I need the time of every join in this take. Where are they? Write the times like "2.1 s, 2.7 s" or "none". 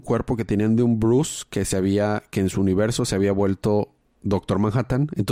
none